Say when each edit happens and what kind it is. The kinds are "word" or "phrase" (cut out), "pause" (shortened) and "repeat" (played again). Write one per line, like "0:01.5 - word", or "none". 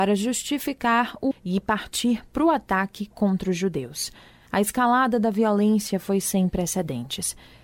0:01.3 - word